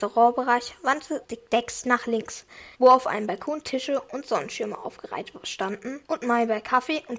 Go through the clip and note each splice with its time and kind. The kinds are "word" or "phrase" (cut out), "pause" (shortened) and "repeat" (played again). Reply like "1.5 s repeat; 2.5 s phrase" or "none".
1.2 s word; 1.8 s word; 2.7 s pause; 6.0 s pause